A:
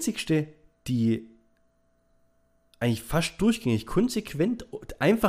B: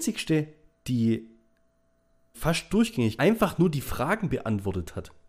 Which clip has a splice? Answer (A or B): B